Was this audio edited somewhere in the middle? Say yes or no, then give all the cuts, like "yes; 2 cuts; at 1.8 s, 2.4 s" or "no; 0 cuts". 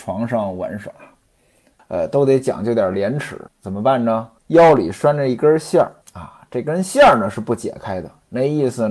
yes; 4 cuts; at 1.8 s, 3.5 s, 4.4 s, 6.0 s